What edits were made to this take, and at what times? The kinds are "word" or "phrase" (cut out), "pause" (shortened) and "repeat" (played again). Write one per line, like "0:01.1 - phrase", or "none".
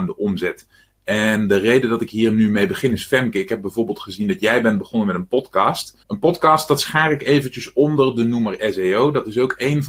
0:06.0 - pause